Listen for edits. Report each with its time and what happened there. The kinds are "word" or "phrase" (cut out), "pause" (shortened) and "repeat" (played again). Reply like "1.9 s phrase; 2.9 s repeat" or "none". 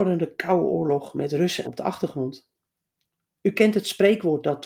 1.6 s phrase